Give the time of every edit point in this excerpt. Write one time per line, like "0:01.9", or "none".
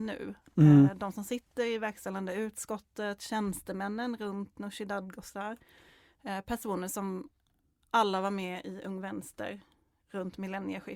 none